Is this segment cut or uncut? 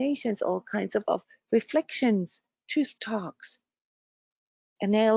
cut